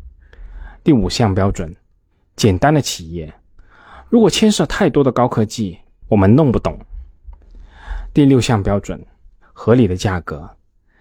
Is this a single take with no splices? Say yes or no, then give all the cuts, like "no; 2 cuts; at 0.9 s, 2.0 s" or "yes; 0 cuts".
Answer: yes; 0 cuts